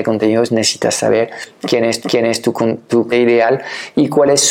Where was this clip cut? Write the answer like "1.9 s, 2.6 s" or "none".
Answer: 2.0 s, 3.1 s